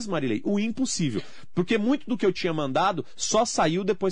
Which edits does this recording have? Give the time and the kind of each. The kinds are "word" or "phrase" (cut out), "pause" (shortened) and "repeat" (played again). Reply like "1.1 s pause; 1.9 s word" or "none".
none